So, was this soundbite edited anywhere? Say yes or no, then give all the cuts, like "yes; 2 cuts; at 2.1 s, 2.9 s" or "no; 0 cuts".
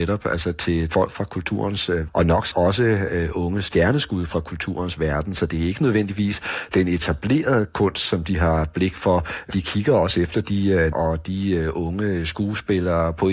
yes; 5 cuts; at 0.9 s, 2.1 s, 2.5 s, 9.5 s, 10.9 s